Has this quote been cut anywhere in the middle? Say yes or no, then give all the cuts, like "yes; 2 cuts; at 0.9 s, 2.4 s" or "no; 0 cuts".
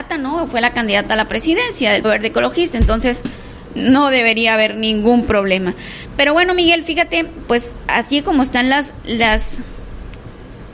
yes; 1 cut; at 2.0 s